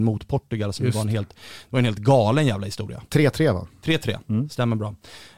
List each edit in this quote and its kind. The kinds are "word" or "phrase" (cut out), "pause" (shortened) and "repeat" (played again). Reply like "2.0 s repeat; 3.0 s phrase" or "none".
none